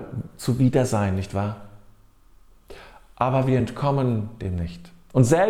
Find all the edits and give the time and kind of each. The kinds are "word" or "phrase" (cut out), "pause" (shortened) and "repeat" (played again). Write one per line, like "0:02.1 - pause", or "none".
none